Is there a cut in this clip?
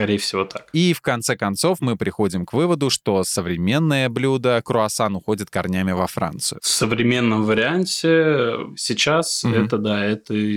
no; 0 cuts

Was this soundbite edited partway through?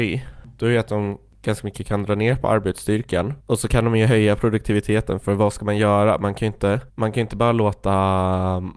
yes; 2 cuts; at 3.4 s, 6.9 s

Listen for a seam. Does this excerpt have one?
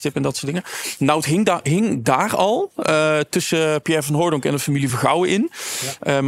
no; 0 cuts

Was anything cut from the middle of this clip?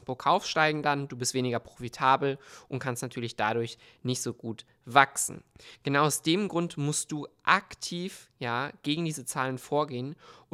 no; 0 cuts

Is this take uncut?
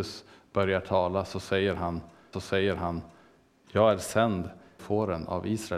no; 2 cuts; at 2.3 s, 4.8 s

